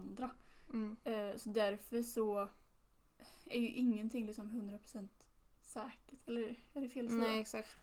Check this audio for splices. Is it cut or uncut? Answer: cut